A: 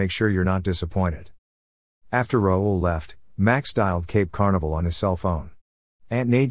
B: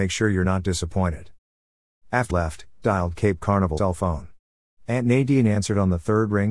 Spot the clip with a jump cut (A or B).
B